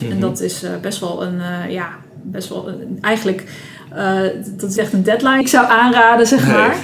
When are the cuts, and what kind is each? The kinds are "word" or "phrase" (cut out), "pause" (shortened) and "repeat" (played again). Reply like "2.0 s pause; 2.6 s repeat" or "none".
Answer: 4.8 s word; 5.4 s word